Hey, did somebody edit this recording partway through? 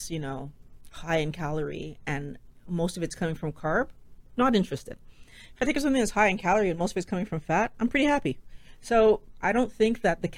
no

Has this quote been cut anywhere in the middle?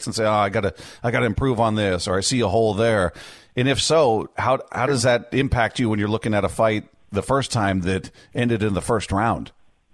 no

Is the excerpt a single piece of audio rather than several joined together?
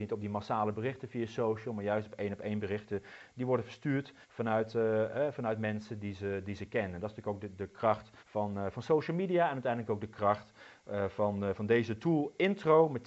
no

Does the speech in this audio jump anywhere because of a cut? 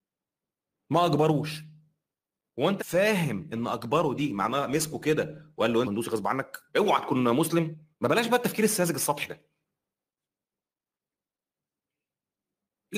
yes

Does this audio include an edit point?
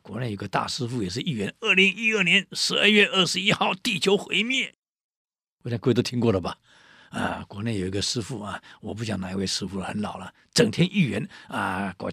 no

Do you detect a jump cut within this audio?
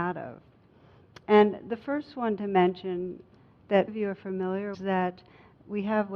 yes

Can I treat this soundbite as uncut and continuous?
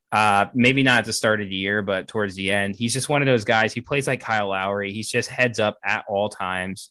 yes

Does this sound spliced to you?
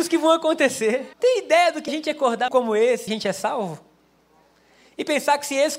yes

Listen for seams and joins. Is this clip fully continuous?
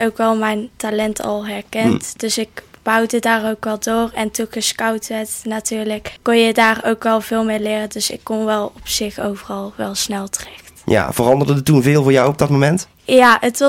no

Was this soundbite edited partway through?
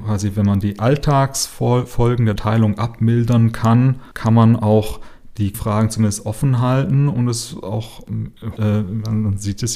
yes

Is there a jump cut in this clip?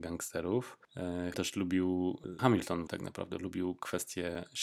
yes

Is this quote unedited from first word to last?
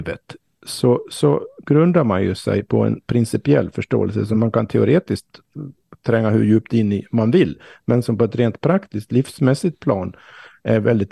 yes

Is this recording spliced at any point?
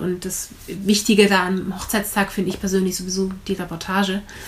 no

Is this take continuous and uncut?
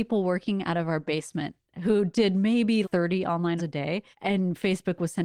no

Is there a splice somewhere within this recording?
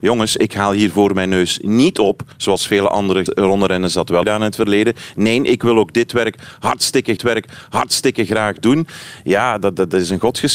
yes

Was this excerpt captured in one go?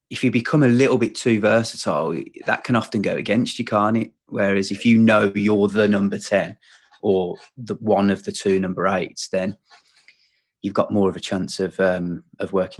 yes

